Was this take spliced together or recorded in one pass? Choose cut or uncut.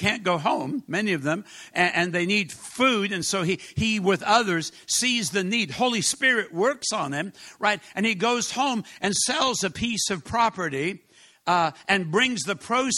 uncut